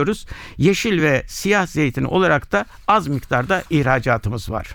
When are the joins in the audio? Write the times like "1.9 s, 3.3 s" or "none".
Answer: none